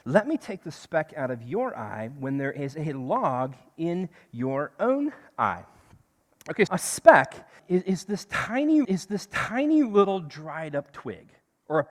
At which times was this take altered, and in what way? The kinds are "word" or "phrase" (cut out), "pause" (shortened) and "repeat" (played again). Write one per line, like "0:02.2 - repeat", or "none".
0:06.7 - word
0:07.6 - word
0:08.8 - repeat